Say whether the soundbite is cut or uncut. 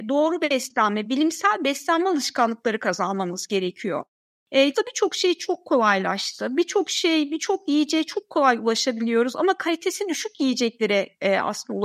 cut